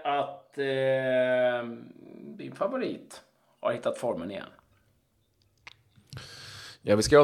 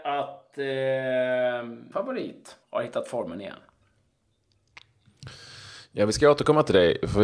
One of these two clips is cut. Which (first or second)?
second